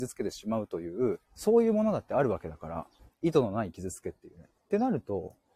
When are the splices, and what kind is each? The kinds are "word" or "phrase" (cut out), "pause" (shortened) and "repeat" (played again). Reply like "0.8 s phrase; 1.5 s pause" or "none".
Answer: 1.3 s pause; 3.0 s pause; 4.6 s pause